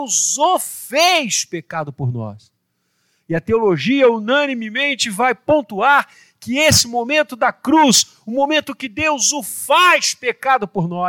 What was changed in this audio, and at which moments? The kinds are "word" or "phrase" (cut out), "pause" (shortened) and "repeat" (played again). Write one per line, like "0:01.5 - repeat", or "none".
none